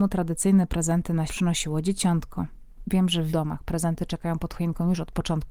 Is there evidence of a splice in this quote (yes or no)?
yes